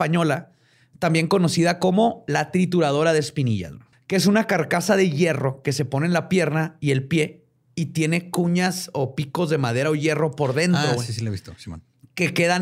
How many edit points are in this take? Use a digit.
1